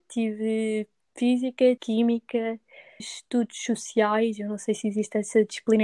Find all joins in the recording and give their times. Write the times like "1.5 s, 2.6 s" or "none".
1.8 s, 3.0 s